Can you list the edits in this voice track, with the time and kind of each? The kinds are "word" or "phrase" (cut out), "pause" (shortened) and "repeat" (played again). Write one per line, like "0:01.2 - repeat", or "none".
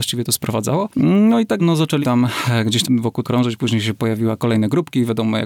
0:01.6 - word
0:02.0 - word
0:02.8 - word
0:03.2 - word
0:04.4 - word